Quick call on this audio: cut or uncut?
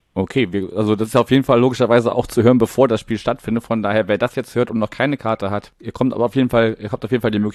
uncut